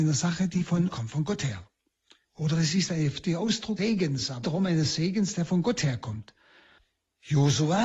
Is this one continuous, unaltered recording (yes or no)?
no